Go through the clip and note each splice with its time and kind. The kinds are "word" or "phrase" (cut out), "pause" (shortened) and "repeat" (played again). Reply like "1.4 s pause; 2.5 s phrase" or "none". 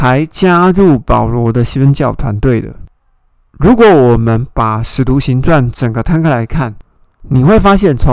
none